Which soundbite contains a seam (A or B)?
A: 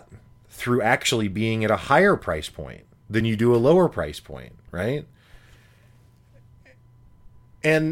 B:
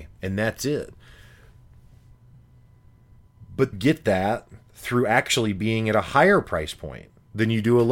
B